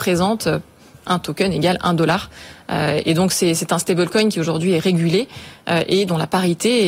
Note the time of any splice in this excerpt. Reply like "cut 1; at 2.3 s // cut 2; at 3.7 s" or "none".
none